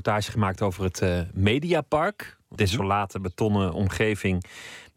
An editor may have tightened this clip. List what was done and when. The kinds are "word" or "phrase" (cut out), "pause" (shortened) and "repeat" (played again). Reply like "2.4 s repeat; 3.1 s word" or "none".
2.6 s word